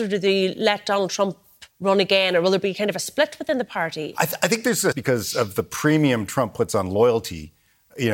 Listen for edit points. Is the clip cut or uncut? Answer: cut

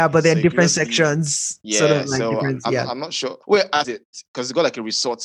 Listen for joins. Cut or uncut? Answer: cut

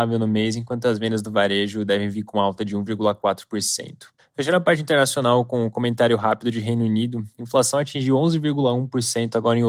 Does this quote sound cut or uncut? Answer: cut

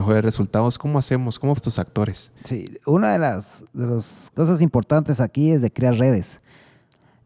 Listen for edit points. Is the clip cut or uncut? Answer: cut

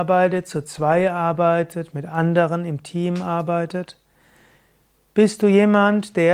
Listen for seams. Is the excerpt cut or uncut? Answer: uncut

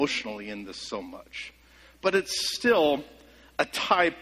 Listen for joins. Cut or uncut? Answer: uncut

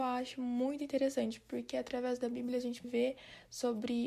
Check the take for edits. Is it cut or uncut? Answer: cut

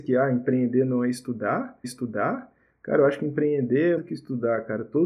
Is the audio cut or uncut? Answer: cut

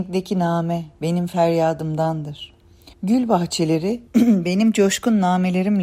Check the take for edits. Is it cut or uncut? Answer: cut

